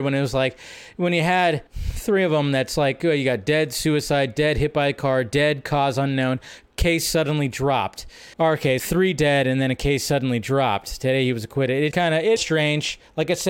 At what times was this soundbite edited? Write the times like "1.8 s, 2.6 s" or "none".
1.7 s, 8.3 s, 8.8 s, 11.9 s, 12.4 s